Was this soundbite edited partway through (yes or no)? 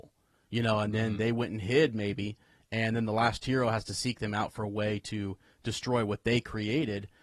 no